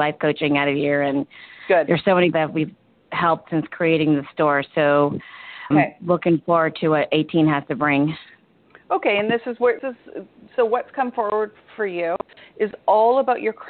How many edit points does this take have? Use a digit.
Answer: 4